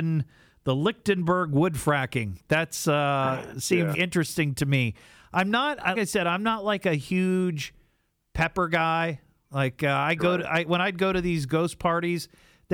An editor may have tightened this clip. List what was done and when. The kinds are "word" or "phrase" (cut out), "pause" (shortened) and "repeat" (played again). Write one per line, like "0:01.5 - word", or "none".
0:03.9 - word
0:05.9 - word